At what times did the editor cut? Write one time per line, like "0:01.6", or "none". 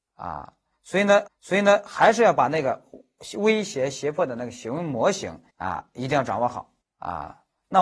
0:01.3
0:05.5
0:06.8